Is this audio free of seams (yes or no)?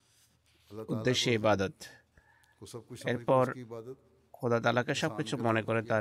yes